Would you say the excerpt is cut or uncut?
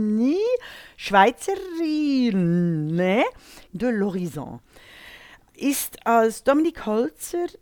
cut